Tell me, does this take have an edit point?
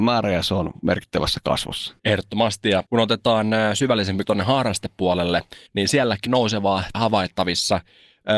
yes; 6 cuts; at 2.0 s, 2.9 s, 4.2 s, 5.7 s, 6.3 s, 6.9 s

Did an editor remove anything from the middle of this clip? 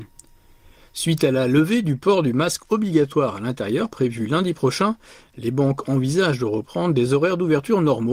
no; 0 cuts

